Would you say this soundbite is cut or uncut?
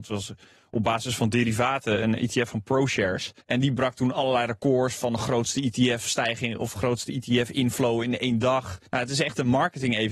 cut